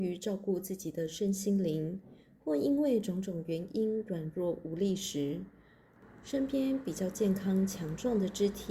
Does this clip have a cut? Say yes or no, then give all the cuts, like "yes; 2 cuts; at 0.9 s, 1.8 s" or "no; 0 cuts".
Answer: no; 0 cuts